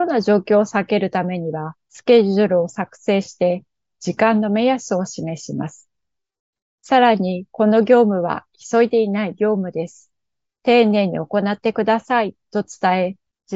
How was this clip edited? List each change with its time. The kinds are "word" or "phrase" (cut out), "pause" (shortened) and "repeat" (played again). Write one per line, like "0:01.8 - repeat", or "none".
0:01.8 - pause